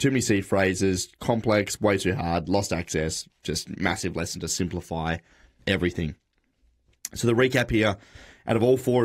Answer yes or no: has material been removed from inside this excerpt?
no